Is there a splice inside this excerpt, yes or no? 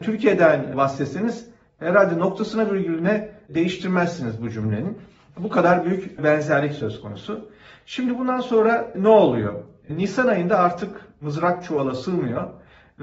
no